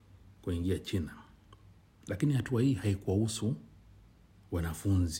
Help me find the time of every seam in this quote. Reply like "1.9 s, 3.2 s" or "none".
none